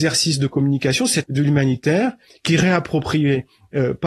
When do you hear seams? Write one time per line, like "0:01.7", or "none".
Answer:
0:01.2